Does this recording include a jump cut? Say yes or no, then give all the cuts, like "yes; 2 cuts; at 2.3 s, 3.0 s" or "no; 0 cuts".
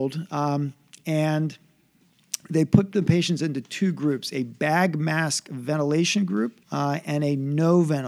yes; 1 cut; at 6.6 s